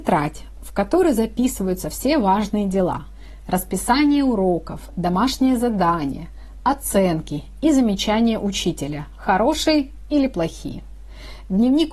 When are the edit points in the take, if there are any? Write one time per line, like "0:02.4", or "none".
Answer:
none